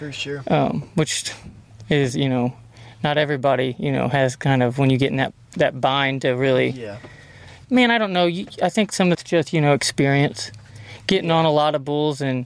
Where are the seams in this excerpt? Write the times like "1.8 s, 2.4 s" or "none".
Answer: 7.6 s, 9.1 s